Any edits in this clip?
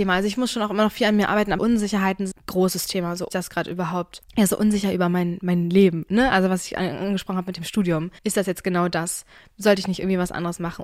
yes; 4 cuts; at 1.6 s, 2.3 s, 3.3 s, 8.2 s

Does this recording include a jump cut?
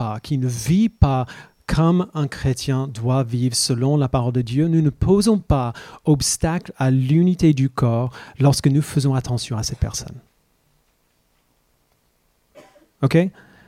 no; 0 cuts

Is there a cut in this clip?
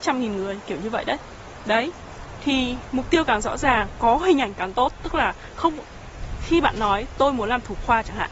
no; 0 cuts

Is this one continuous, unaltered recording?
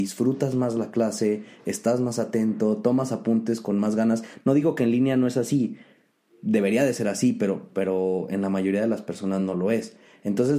yes; 0 cuts

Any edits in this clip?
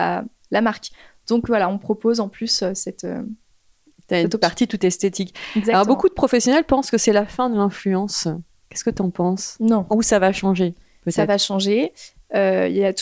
no; 0 cuts

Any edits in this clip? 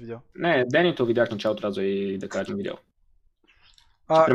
yes; 3 cuts; at 1.3 s, 1.6 s, 2.5 s

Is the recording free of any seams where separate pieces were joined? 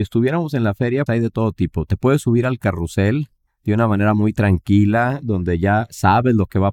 no; 1 cut; at 1.1 s

